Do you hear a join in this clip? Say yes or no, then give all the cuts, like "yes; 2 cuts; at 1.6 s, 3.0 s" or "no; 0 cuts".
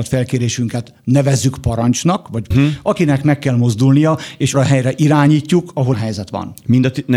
yes; 3 cuts; at 2.5 s, 4.5 s, 5.9 s